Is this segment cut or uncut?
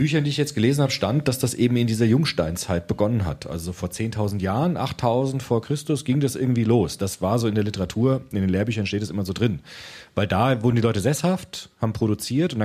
uncut